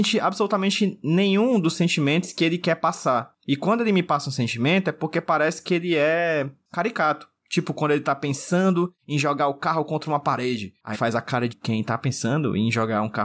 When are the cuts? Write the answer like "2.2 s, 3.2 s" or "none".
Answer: 10.9 s, 11.5 s